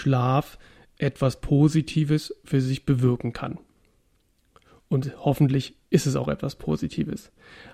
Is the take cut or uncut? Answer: uncut